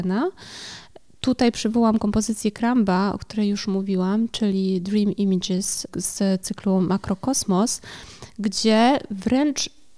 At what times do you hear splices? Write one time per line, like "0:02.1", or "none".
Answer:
none